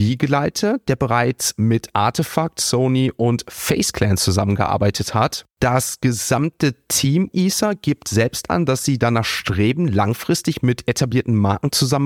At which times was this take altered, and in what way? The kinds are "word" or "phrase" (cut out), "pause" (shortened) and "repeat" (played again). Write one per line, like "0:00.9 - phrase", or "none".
0:05.5 - pause
0:07.3 - word